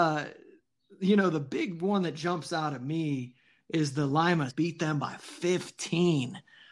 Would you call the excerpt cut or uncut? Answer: cut